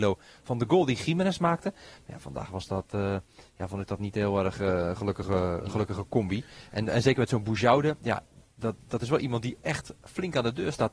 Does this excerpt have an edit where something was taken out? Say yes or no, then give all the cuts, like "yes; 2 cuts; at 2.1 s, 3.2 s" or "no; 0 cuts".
no; 0 cuts